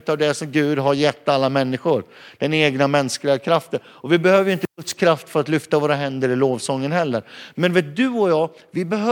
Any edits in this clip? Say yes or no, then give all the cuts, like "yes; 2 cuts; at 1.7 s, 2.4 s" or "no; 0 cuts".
no; 0 cuts